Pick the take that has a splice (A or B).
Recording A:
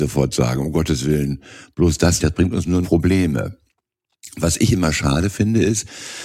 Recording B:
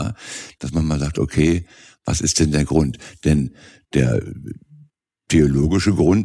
A